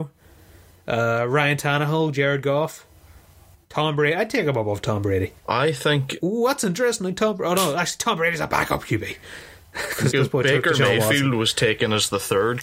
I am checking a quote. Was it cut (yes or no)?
yes